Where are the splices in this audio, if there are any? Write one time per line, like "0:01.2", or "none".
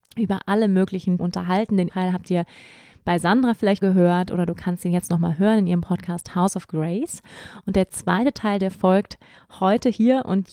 0:01.2
0:01.9
0:03.8